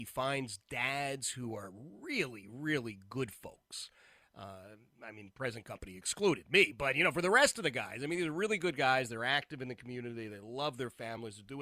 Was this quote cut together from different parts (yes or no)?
no